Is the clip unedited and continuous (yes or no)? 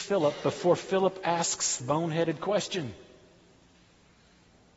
no